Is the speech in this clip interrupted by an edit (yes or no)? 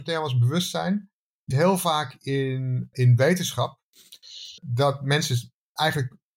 yes